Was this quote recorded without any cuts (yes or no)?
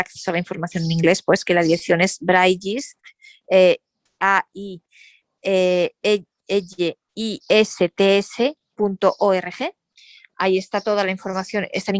no